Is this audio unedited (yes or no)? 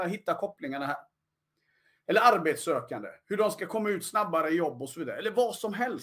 yes